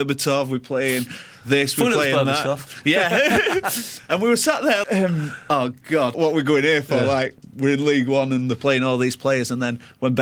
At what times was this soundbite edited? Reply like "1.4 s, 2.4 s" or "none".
4.8 s, 6.1 s